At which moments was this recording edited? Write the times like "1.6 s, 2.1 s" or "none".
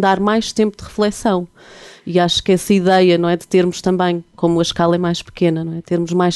none